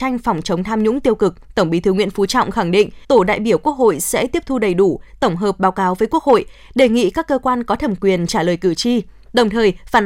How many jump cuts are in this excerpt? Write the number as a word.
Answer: two